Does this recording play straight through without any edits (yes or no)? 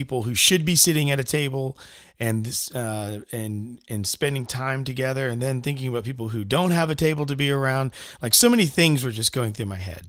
yes